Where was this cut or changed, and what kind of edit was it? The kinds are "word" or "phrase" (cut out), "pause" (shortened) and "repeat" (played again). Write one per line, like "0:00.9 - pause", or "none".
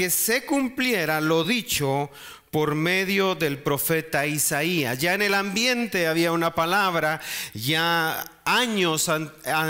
none